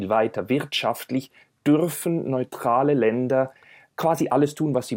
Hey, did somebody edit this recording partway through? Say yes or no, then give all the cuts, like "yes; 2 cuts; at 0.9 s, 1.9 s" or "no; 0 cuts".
no; 0 cuts